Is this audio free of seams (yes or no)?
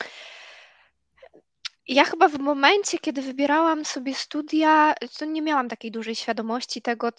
no